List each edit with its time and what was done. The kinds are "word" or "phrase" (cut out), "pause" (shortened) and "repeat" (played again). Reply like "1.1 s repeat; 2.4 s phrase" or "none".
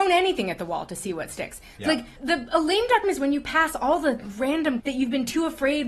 2.2 s word; 3.0 s word; 4.8 s word